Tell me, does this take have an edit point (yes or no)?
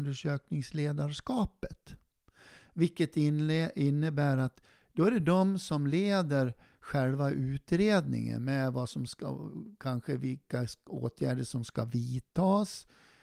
no